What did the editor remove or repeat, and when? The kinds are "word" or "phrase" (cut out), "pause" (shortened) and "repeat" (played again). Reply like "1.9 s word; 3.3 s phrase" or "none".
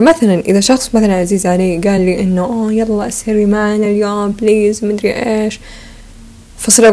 none